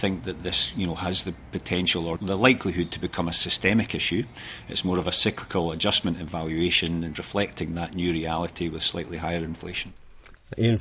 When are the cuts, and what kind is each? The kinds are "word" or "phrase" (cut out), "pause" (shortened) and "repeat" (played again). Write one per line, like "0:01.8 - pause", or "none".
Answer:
0:02.2 - word
0:07.1 - word